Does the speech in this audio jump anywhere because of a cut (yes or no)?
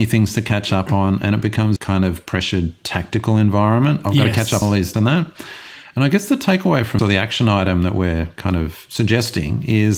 yes